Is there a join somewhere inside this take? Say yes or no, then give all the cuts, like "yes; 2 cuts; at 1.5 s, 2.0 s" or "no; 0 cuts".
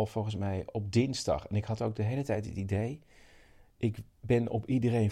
no; 0 cuts